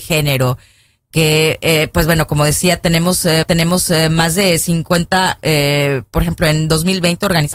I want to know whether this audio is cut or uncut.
cut